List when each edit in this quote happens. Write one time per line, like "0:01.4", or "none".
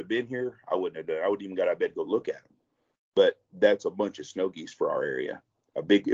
none